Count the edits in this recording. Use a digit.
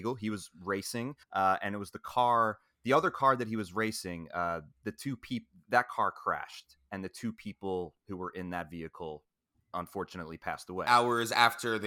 3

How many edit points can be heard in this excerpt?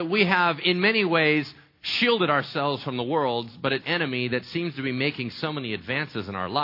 1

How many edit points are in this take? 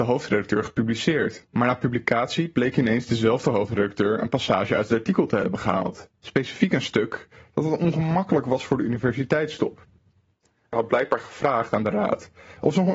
1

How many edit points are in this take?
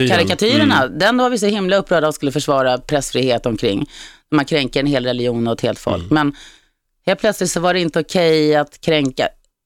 0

